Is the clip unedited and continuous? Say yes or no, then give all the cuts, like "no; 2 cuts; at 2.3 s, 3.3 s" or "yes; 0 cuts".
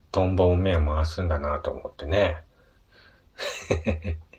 yes; 0 cuts